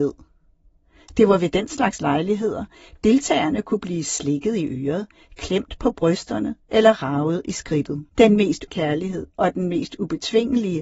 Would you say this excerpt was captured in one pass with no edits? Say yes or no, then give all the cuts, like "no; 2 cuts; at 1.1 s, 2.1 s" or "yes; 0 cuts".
no; 2 cuts; at 8.1 s, 8.7 s